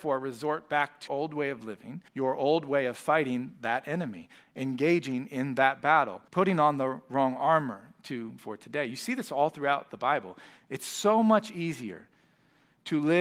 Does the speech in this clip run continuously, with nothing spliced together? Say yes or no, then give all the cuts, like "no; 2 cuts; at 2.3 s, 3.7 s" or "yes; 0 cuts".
no; 4 cuts; at 1.1 s, 2.1 s, 6.3 s, 8.4 s